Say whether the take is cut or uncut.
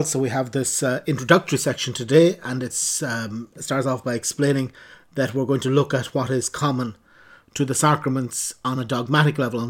uncut